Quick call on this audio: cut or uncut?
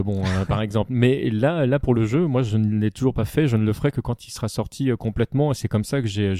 uncut